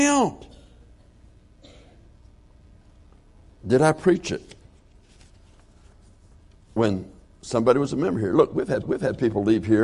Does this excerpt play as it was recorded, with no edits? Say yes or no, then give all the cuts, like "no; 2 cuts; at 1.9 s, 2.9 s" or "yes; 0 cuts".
no; 1 cut; at 8.8 s